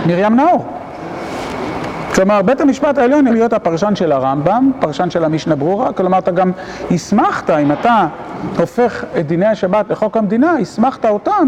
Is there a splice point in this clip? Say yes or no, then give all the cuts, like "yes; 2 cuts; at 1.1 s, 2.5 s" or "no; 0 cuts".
yes; 1 cut; at 3.3 s